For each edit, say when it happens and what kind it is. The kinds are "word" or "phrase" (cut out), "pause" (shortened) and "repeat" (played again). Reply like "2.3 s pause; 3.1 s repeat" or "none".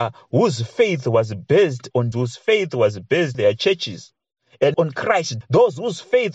2.1 s word; 3.3 s word; 4.7 s word; 5.4 s word

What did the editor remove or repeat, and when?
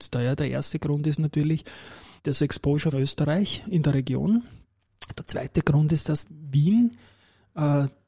2.2 s pause; 2.9 s word; 6.3 s word

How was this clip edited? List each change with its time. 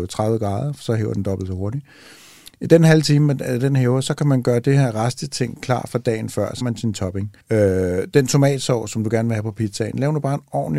6.6 s word; 7.4 s pause

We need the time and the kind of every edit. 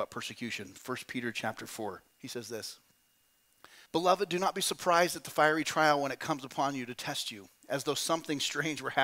2.1 s pause; 3.9 s pause

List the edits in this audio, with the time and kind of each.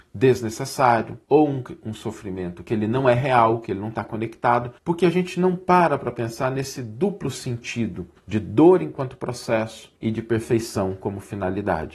1.2 s pause; 4.8 s pause; 8.2 s pause; 10.0 s pause

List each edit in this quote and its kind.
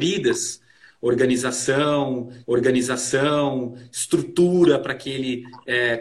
2.4 s repeat

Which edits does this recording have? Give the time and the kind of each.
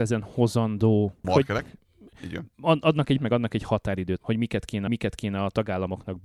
1.2 s word; 3.2 s phrase; 4.2 s word; 4.9 s repeat

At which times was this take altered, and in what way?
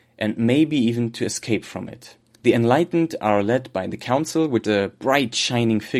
2.3 s pause; 4.6 s word

